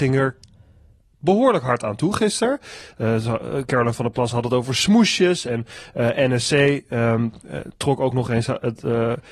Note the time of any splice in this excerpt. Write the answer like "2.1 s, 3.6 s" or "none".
none